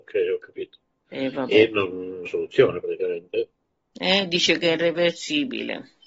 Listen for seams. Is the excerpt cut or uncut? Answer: cut